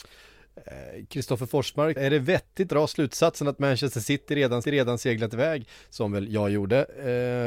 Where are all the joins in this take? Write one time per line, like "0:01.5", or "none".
0:02.0
0:02.7
0:04.6